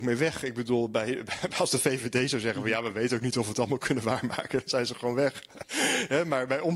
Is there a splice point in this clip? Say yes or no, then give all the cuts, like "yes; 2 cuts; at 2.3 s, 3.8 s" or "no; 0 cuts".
no; 0 cuts